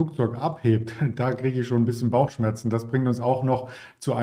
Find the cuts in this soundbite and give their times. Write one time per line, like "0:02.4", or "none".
none